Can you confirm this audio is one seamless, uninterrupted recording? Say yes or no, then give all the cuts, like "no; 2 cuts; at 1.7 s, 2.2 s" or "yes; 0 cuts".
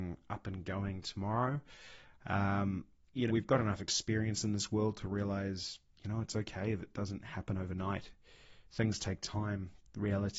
no; 1 cut; at 3.3 s